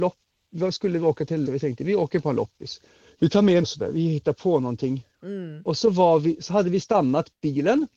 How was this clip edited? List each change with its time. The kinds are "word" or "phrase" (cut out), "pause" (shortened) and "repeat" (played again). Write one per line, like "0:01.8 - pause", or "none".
0:01.5 - word
0:02.9 - pause
0:03.6 - word
0:05.1 - pause